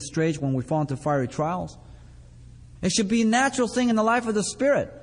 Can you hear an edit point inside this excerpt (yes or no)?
no